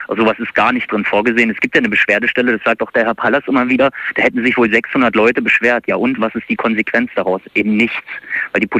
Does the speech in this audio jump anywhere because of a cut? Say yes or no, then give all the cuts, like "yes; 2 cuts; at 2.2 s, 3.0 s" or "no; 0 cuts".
no; 0 cuts